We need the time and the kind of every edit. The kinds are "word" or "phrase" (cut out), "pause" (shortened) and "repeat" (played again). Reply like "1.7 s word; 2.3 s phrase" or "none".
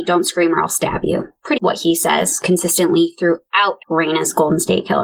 1.6 s word; 3.8 s word